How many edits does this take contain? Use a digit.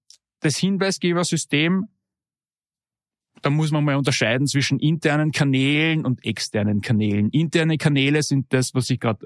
0